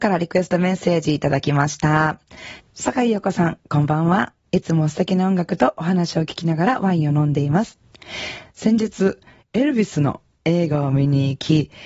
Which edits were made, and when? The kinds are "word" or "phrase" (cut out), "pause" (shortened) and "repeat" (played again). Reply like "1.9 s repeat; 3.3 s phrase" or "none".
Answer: none